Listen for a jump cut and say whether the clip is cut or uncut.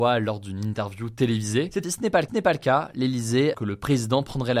cut